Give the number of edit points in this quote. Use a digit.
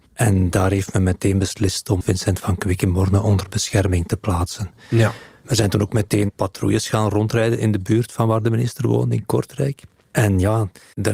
1